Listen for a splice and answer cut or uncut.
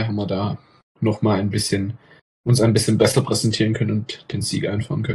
uncut